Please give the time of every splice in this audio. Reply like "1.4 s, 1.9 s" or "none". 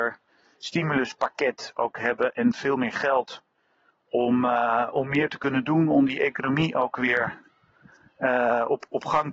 none